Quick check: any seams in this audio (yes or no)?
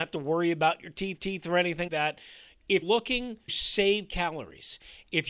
yes